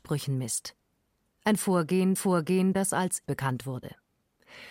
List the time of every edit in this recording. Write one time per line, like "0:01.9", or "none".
0:02.2
0:03.3